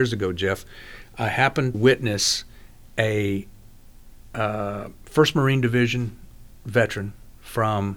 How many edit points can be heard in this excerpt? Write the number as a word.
one